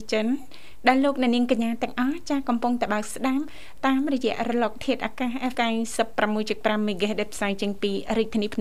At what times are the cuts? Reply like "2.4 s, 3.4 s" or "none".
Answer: 5.5 s